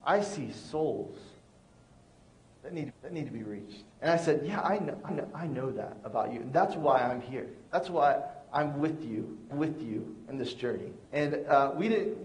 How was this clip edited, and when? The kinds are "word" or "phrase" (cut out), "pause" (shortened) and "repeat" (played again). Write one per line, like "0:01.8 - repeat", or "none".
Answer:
0:02.9 - repeat
0:03.9 - pause
0:05.1 - repeat
0:07.7 - pause
0:09.5 - repeat
0:11.0 - pause